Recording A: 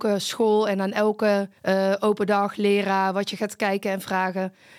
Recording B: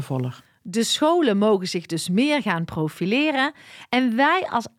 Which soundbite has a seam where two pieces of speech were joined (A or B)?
A